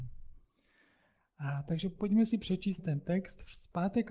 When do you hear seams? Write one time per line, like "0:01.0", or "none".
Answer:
0:02.8